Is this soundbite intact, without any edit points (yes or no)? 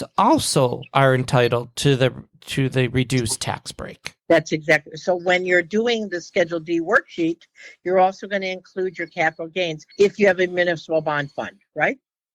no